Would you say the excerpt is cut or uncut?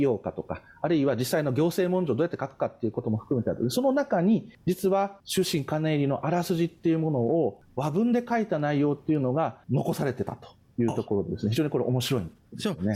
cut